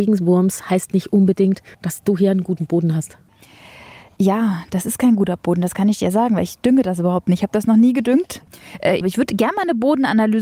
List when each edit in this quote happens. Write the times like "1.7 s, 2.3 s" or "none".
1.7 s